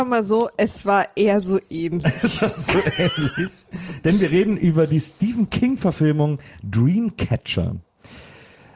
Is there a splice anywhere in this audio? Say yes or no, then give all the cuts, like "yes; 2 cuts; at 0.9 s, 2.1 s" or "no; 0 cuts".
no; 0 cuts